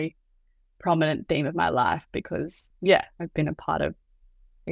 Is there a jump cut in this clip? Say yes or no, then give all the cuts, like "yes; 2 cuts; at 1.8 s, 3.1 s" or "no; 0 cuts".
no; 0 cuts